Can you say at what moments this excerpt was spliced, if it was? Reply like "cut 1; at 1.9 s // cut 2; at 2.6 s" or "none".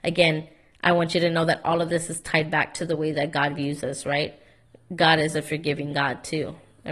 none